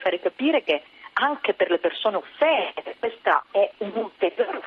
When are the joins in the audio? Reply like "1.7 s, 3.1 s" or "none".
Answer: none